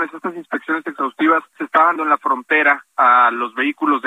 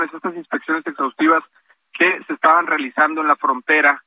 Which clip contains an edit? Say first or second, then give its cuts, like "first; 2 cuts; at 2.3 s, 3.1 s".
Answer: first; 2 cuts; at 1.6 s, 2.0 s